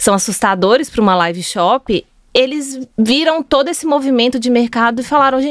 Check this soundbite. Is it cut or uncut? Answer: cut